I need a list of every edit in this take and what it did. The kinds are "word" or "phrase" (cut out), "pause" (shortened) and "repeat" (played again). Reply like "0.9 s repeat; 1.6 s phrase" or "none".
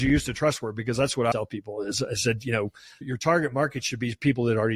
1.3 s word